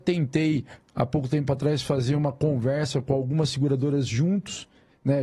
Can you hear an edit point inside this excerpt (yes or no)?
no